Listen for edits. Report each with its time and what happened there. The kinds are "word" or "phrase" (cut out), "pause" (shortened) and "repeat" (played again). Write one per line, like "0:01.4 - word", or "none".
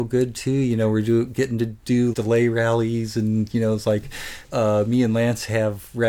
0:02.1 - word

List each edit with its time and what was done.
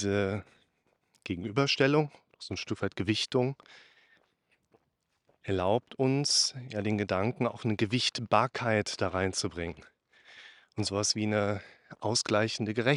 none

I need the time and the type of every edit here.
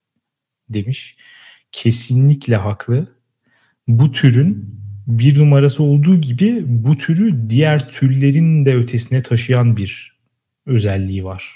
none

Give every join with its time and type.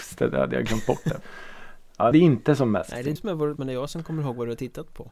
0:01.2 - word
0:02.1 - word
0:03.2 - word
0:03.6 - word

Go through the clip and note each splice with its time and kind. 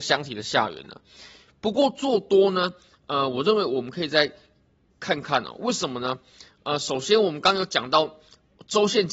none

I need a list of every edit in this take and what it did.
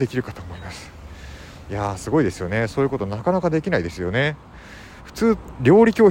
none

